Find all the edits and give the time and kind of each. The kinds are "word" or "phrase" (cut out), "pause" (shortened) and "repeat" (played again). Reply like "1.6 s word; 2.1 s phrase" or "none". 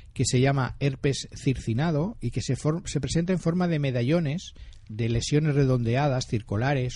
none